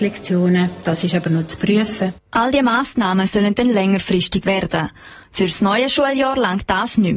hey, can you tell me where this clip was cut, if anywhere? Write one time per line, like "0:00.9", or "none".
0:04.4